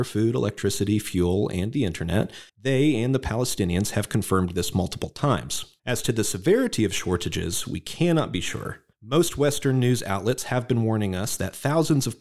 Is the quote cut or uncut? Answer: cut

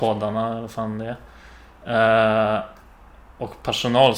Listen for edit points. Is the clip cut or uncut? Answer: uncut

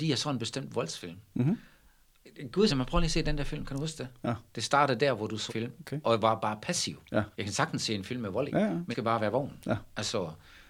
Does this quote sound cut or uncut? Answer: cut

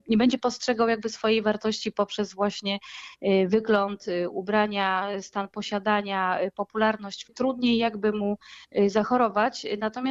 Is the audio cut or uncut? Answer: cut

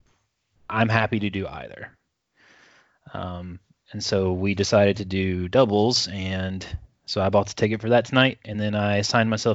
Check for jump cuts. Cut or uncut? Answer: uncut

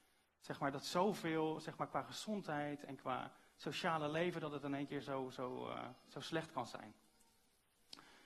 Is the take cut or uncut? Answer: uncut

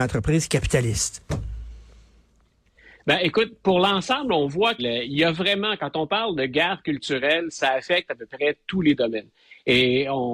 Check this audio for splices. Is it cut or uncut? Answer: cut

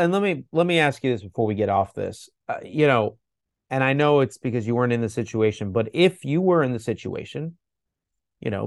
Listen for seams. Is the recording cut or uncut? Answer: uncut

